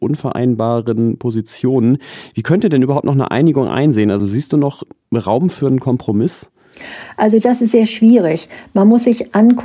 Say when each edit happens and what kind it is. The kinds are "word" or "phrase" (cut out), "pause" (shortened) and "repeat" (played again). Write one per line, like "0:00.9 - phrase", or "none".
none